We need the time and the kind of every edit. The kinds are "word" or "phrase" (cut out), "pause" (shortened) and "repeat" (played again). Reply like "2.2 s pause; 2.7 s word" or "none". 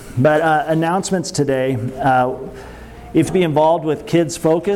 3.2 s phrase